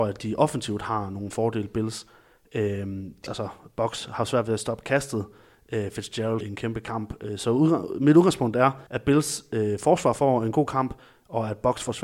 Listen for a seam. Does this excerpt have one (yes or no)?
yes